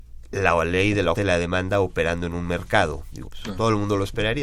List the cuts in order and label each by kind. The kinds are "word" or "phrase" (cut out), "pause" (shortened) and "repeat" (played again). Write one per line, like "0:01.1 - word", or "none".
0:01.1 - word
0:03.3 - word